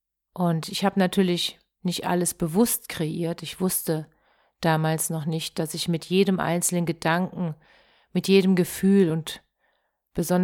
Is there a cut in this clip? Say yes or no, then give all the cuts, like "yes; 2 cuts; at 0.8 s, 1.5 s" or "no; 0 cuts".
no; 0 cuts